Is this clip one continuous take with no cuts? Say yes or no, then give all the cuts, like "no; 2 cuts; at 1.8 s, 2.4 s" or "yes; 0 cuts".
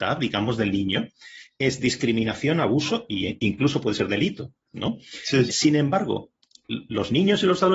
no; 1 cut; at 5.5 s